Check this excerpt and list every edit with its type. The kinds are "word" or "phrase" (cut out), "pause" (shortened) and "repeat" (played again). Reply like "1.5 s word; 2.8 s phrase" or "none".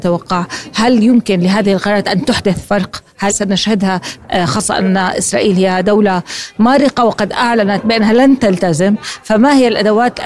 3.3 s word